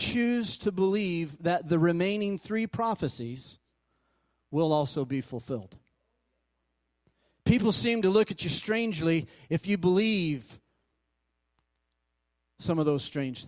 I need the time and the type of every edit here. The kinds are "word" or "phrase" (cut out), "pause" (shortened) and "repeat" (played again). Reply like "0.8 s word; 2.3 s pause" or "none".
none